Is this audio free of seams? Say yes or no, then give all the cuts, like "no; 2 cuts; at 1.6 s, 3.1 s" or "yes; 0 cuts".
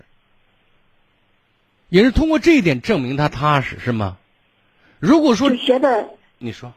yes; 0 cuts